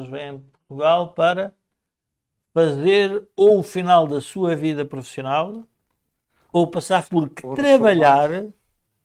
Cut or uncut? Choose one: cut